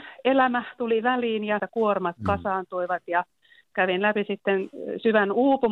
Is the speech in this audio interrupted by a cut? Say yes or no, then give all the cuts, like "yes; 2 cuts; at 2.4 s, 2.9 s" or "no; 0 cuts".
yes; 1 cut; at 1.6 s